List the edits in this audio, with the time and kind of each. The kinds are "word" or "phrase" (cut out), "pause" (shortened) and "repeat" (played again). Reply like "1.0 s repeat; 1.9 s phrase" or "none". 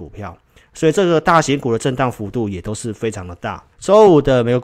3.7 s pause